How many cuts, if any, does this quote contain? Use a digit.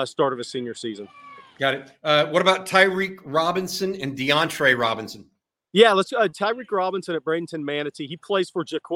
0